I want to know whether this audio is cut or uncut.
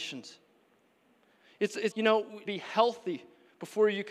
cut